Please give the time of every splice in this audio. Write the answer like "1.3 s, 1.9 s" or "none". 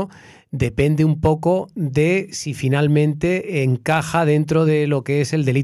none